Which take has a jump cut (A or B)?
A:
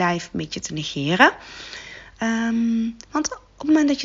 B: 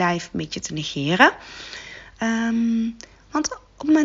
A